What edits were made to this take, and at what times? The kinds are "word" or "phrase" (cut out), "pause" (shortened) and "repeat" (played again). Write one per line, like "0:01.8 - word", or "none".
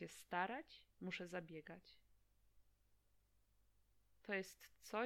0:00.9 - pause